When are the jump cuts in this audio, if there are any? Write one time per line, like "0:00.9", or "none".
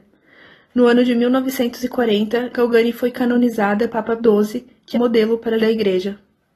0:02.5
0:03.9
0:04.2
0:04.9
0:05.6